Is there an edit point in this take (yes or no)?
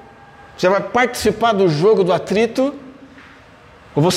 no